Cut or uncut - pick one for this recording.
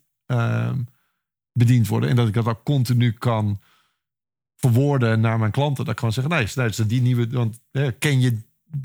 uncut